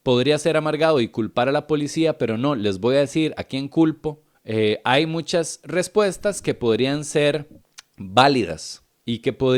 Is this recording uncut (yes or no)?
no